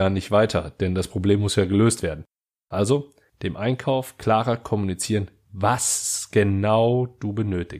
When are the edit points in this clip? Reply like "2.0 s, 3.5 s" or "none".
none